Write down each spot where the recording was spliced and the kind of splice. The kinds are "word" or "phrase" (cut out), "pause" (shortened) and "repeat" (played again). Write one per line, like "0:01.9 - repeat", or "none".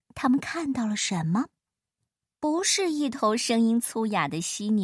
none